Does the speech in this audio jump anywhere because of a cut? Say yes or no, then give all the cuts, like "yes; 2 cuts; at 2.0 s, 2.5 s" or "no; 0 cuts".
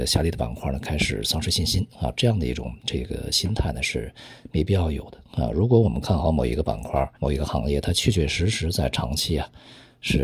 yes; 1 cut; at 7.1 s